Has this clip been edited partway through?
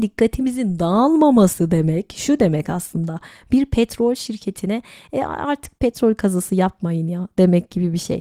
no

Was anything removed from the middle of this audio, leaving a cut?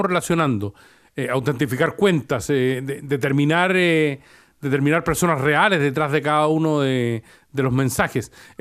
no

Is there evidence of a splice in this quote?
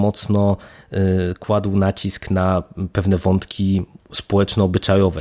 no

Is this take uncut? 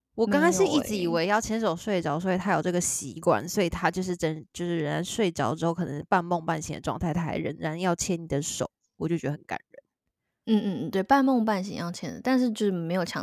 yes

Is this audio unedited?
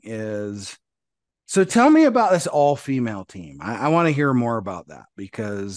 yes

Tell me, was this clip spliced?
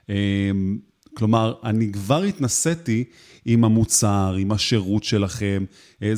no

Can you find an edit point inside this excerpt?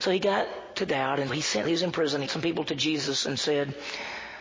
yes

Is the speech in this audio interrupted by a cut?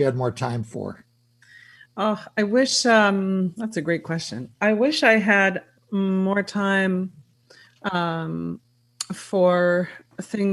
no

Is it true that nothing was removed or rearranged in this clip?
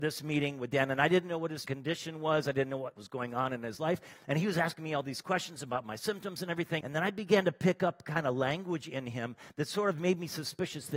no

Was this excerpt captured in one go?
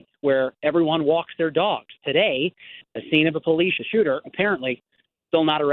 no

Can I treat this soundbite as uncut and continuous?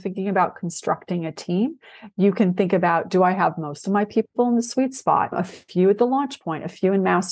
yes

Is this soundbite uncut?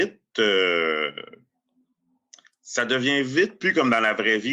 yes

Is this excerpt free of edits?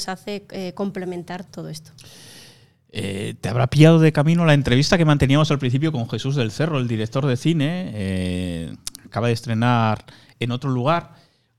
no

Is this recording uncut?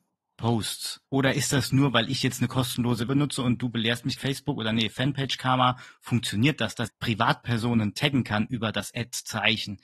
no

